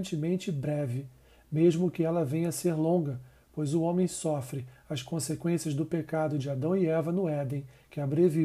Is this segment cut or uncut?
uncut